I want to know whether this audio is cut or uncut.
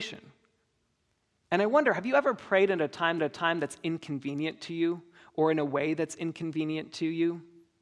cut